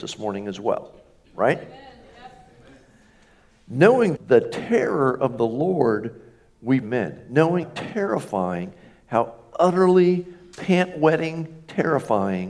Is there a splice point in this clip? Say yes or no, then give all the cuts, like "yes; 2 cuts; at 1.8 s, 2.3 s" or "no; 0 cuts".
yes; 3 cuts; at 4.1 s, 6.8 s, 7.6 s